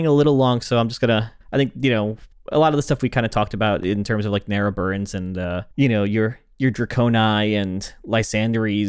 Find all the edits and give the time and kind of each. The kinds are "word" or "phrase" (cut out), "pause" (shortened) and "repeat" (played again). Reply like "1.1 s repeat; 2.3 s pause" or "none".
1.4 s pause; 2.3 s pause; 5.7 s pause